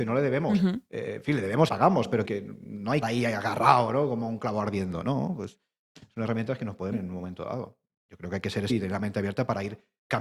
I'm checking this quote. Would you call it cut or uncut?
cut